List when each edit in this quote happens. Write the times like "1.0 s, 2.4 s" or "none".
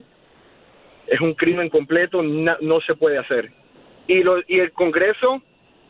3.8 s